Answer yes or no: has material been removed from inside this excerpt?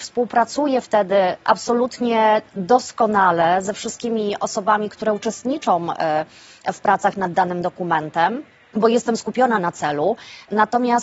no